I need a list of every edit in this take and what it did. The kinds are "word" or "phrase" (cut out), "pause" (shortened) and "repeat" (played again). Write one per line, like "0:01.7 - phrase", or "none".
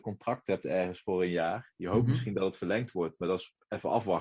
none

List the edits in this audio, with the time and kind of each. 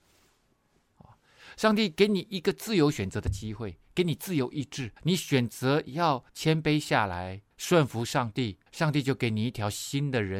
0:05.0 - pause
0:06.3 - pause
0:07.5 - pause
0:08.7 - pause

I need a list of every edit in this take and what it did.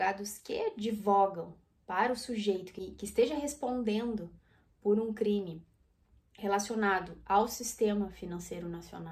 none

